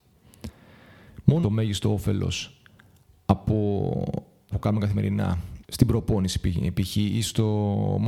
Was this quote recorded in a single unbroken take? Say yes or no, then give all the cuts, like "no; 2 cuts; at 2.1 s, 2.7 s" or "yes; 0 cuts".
no; 3 cuts; at 1.4 s, 4.5 s, 5.6 s